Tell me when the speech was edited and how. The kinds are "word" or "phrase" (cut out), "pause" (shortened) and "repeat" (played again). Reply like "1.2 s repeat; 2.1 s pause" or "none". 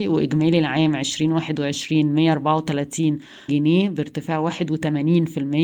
3.5 s word